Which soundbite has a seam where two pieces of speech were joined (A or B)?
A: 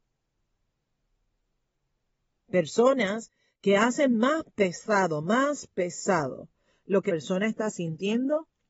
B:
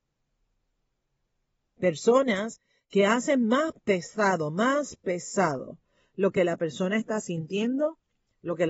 A